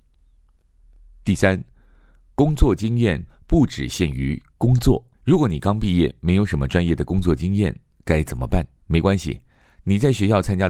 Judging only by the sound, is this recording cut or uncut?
cut